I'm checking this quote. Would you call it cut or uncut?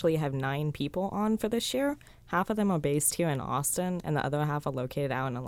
uncut